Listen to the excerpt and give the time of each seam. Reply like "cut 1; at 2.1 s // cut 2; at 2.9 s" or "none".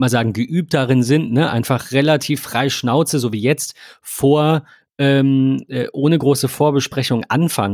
none